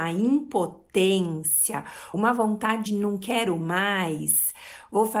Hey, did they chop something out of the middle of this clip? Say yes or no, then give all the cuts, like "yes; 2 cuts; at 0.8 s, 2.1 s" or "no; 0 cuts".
yes; 2 cuts; at 2.1 s, 2.9 s